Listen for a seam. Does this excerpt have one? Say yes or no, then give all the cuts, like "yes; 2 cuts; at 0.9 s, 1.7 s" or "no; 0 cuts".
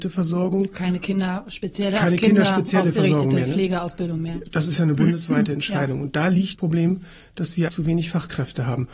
yes; 2 cuts; at 6.5 s, 7.7 s